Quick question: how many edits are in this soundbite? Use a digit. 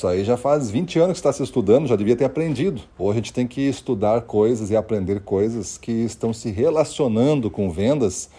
1